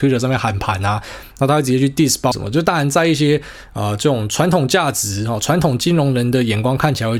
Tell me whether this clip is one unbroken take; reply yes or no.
no